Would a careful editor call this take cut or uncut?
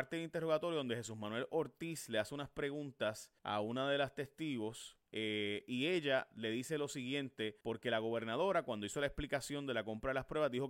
cut